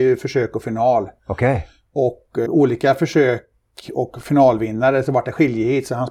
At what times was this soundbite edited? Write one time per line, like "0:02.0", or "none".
0:02.5